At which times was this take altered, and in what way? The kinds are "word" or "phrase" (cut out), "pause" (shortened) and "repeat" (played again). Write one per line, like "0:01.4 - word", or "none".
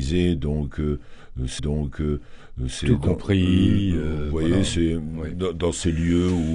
0:01.6 - repeat